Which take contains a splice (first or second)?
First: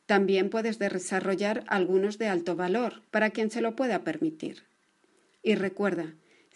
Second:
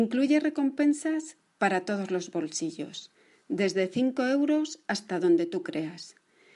first